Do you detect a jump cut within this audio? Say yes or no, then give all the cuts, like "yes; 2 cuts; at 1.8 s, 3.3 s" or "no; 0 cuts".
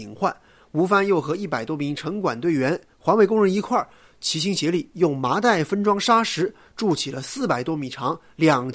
no; 0 cuts